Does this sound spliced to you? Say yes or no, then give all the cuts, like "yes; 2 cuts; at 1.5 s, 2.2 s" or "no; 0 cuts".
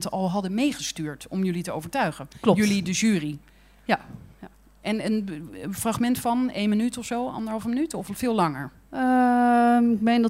no; 0 cuts